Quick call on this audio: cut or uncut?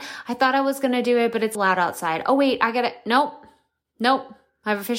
cut